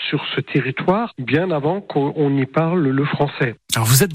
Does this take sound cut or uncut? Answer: uncut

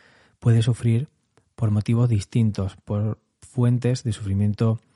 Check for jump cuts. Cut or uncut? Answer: uncut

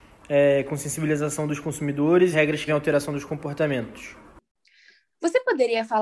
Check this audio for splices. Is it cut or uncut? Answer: cut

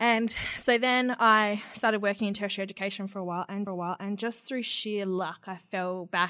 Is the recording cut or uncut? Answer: cut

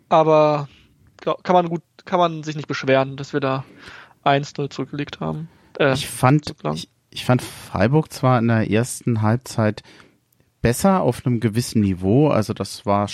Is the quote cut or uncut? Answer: uncut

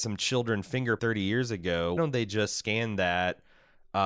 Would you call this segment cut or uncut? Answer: cut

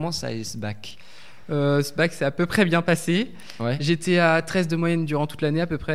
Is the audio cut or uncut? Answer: uncut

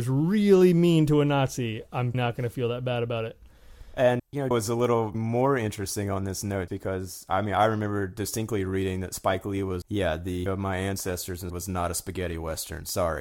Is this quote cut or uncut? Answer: cut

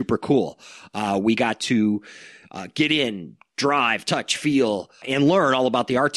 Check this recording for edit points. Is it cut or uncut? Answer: uncut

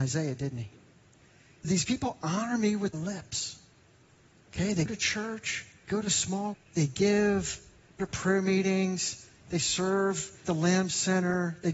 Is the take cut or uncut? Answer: cut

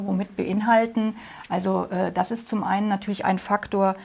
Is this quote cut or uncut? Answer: uncut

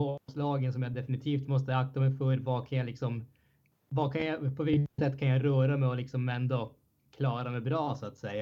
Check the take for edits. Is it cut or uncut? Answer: uncut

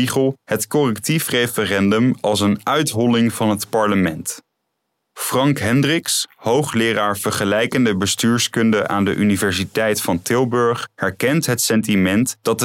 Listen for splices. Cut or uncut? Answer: uncut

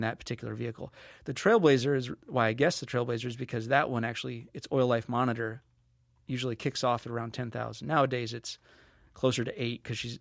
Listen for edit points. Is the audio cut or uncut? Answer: uncut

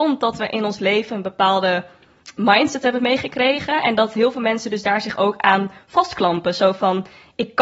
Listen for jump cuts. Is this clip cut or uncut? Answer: uncut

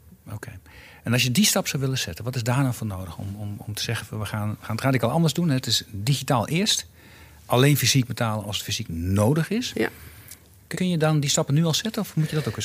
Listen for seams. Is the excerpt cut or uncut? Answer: cut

